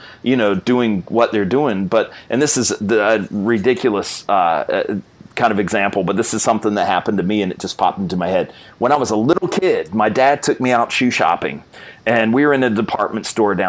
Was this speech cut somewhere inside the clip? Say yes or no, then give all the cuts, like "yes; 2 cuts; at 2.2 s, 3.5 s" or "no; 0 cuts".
no; 0 cuts